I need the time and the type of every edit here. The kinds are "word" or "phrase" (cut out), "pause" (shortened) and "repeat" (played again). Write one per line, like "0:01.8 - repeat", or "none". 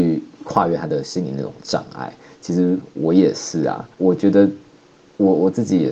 0:03.9 - pause

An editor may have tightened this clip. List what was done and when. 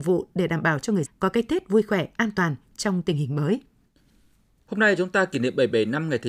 0:01.1 - word

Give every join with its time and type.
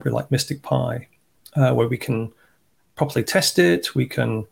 none

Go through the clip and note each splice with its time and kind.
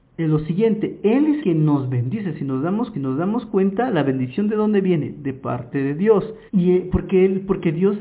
0:01.4 - word
0:02.9 - repeat
0:06.5 - pause

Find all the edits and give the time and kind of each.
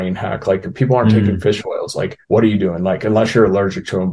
0:02.2 - pause

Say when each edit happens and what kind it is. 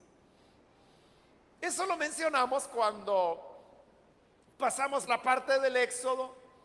0:05.1 - word

